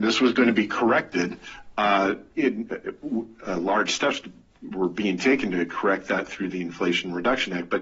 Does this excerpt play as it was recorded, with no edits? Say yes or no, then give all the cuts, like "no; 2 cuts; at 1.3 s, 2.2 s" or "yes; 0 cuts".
yes; 0 cuts